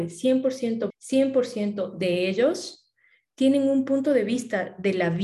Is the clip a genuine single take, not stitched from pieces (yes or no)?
no